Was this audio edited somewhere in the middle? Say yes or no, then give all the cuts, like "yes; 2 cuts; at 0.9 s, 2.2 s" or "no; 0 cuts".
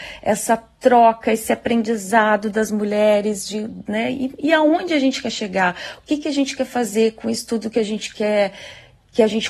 no; 0 cuts